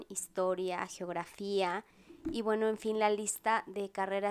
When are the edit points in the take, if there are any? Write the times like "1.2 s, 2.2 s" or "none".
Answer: none